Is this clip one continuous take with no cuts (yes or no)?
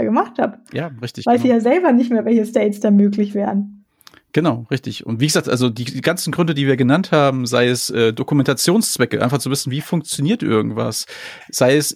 yes